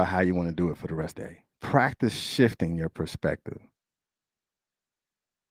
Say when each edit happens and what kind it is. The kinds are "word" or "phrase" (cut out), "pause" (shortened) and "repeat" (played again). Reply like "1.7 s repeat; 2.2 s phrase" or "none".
1.1 s phrase; 1.5 s pause